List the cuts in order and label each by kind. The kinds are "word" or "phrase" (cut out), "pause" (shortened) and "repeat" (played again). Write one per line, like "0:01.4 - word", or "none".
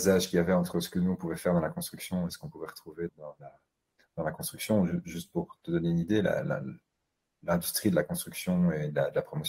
0:03.1 - word